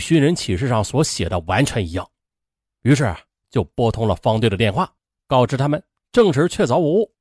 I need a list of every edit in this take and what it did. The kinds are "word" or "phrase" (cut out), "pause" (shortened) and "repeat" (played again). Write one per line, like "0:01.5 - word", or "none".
none